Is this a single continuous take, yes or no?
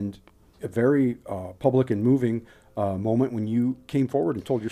yes